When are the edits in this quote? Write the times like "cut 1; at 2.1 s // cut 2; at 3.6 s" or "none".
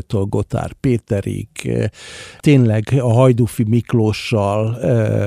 none